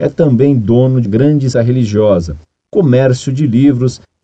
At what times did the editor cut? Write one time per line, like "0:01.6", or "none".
0:01.0
0:01.5